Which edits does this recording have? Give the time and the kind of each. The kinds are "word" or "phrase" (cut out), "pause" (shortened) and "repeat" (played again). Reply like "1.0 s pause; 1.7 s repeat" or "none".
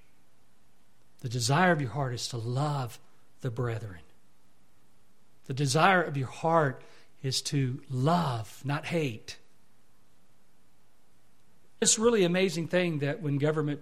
11.8 s word